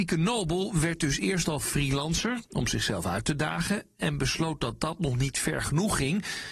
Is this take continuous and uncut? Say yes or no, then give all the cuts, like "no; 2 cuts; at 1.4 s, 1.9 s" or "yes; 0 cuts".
yes; 0 cuts